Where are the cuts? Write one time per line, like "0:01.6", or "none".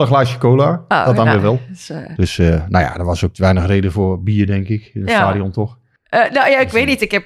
0:06.0